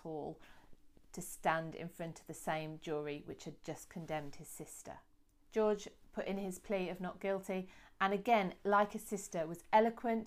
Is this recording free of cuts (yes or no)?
yes